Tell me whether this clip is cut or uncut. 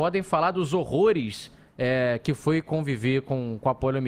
uncut